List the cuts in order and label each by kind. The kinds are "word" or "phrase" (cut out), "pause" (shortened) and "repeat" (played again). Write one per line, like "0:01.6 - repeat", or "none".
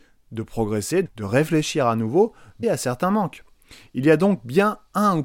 0:01.1 - word
0:02.6 - word